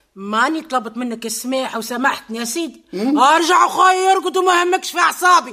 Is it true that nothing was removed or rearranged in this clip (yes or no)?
yes